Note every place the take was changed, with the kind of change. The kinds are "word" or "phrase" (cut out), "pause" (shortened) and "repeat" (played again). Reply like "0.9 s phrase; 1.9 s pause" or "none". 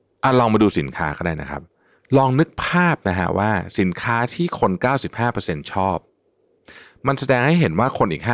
none